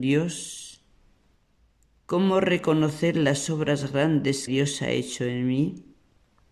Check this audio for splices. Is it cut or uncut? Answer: cut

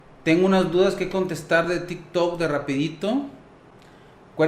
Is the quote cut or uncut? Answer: uncut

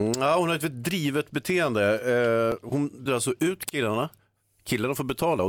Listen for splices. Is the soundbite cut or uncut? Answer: cut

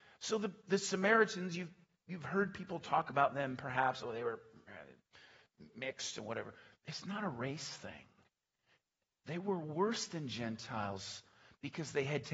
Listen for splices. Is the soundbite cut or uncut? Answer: uncut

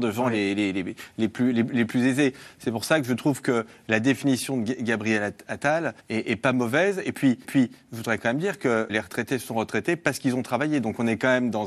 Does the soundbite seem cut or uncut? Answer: cut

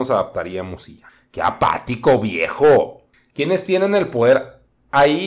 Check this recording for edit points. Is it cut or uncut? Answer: uncut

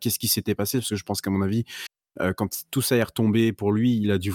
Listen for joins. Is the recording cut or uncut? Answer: uncut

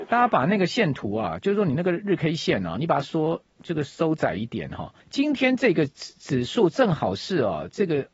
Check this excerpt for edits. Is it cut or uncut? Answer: cut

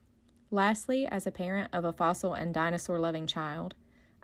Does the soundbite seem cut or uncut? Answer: uncut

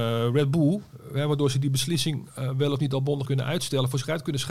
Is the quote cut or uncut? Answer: cut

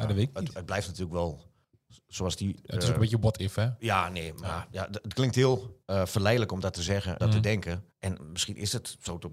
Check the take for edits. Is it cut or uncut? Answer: cut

